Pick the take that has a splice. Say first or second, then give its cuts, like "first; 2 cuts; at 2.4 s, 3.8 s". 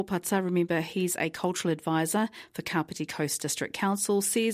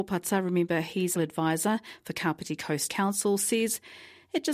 second; 2 cuts; at 1.2 s, 2.9 s